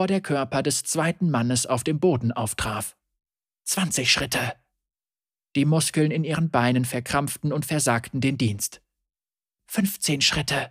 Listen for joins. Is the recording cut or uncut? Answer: uncut